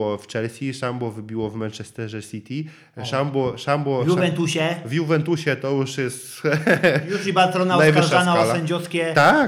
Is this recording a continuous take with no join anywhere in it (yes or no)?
yes